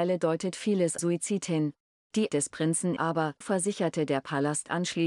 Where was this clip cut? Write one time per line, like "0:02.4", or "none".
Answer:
0:01.0
0:02.3
0:03.0
0:03.4